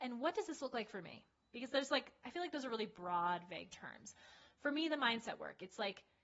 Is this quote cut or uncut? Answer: uncut